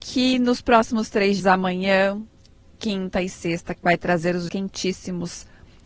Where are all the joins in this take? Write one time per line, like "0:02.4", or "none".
0:01.4
0:03.7
0:04.5